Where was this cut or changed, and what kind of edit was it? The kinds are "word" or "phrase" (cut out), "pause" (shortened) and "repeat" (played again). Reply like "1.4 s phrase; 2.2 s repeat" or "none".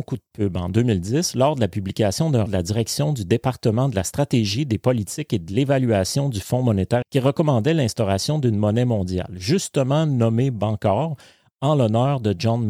2.5 s word; 7.0 s word